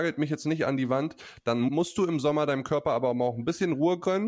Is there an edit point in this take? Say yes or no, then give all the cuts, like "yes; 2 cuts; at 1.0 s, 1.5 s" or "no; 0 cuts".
no; 0 cuts